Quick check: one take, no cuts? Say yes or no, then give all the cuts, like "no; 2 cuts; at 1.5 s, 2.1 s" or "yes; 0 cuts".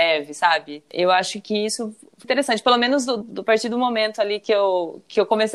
no; 2 cuts; at 2.2 s, 3.2 s